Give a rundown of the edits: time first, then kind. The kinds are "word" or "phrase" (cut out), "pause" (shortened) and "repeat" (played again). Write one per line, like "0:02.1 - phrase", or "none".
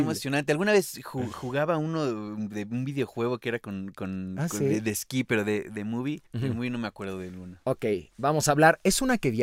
0:06.3 - pause